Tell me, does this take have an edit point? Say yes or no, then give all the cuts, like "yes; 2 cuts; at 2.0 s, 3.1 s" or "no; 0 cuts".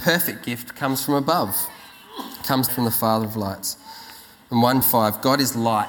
yes; 2 cuts; at 2.7 s, 4.8 s